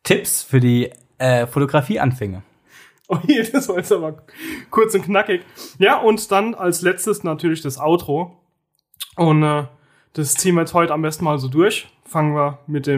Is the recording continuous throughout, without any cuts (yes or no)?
yes